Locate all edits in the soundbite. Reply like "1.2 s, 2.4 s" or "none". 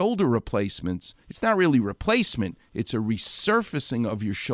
1.2 s